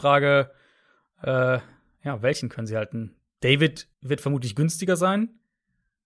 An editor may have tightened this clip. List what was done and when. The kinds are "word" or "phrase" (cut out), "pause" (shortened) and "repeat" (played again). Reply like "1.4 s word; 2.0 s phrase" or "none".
3.9 s pause